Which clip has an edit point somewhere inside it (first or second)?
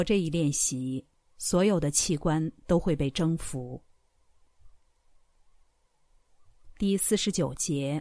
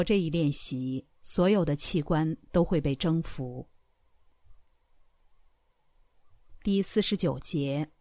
second